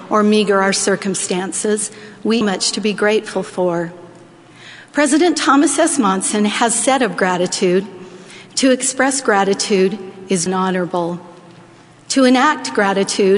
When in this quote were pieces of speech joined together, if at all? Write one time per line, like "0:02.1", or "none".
0:02.4
0:10.5